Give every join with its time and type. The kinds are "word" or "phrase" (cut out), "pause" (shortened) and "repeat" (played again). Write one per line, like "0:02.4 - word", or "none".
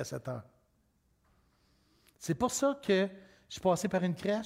none